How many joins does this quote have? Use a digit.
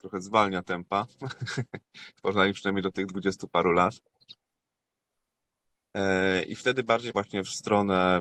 1